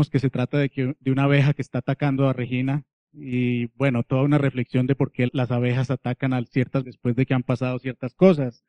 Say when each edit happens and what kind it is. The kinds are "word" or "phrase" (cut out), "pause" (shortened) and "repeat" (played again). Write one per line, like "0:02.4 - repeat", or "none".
0:03.0 - pause
0:05.3 - word
0:06.8 - word